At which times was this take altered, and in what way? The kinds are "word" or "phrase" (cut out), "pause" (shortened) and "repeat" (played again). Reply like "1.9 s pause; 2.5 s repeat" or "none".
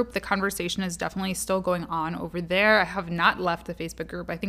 none